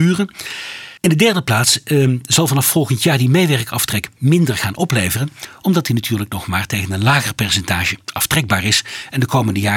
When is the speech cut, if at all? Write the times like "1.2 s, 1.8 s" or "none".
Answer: 1.0 s